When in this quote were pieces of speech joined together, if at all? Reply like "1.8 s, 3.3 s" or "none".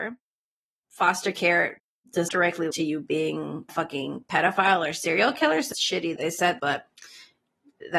2.3 s, 2.7 s, 3.7 s, 5.7 s, 6.2 s, 6.6 s